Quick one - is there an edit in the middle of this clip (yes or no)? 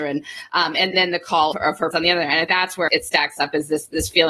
yes